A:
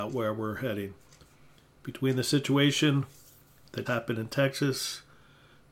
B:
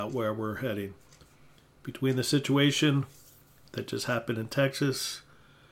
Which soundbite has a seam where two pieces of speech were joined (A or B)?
A